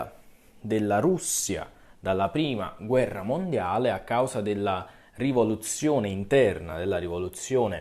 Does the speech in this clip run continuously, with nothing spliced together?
yes; 0 cuts

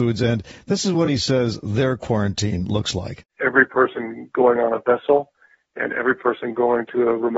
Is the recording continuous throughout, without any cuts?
yes; 0 cuts

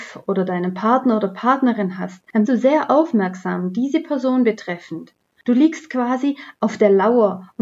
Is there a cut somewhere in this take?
yes; 1 cut; at 2.4 s

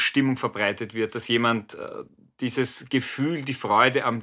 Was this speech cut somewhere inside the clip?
no; 0 cuts

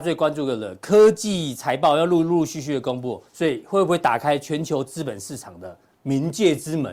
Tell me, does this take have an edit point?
yes; 1 cut; at 3.3 s

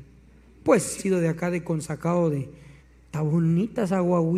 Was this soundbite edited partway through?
yes; 2 cuts; at 1.0 s, 2.8 s

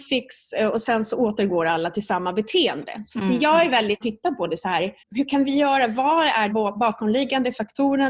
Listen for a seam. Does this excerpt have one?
yes; 3 cuts; at 4.0 s, 5.0 s, 6.5 s

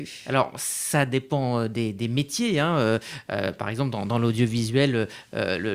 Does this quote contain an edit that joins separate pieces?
no; 0 cuts

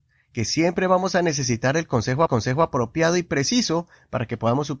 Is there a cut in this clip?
yes; 1 cut; at 2.3 s

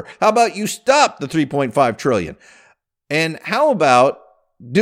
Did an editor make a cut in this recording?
no; 0 cuts

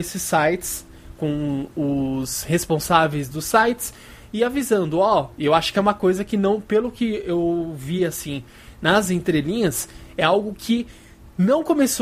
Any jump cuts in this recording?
no; 0 cuts

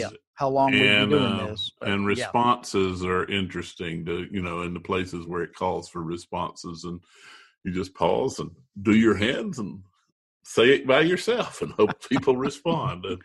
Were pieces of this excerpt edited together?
no; 0 cuts

